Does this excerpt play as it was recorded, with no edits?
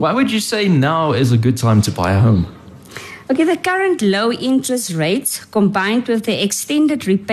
yes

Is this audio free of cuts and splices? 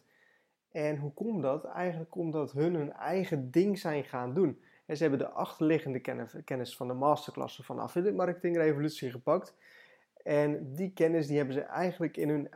yes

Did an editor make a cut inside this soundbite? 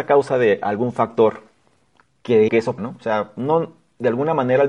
yes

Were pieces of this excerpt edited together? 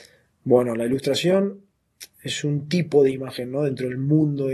no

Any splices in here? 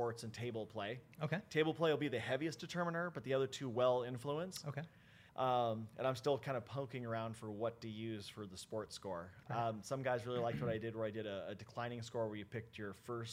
yes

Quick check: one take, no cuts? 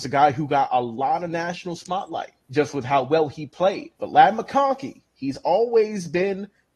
no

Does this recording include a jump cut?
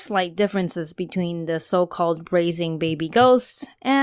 no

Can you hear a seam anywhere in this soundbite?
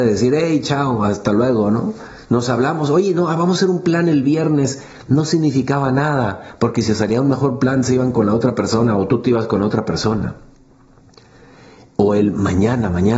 no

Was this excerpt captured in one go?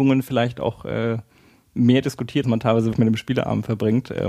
no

